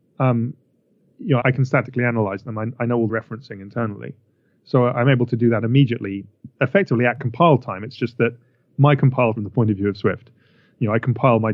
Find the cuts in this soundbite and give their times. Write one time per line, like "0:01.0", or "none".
0:01.4
0:03.1
0:09.4